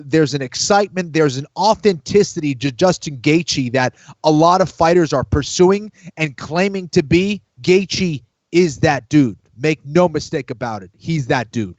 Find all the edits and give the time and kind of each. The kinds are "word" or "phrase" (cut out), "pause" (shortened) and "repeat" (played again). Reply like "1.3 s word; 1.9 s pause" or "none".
7.5 s pause